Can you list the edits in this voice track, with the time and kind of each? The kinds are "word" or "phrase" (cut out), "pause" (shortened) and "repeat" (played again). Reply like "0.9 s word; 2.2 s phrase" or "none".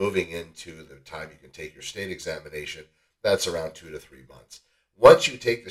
none